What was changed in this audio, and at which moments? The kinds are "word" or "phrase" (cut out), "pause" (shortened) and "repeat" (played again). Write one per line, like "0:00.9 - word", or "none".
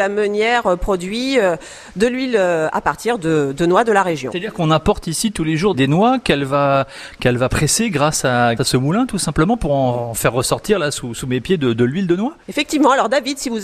0:05.7 - word
0:08.6 - word
0:12.4 - pause